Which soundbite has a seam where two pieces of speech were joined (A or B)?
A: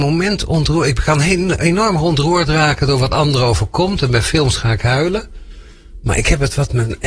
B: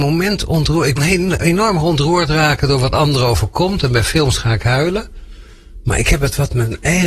B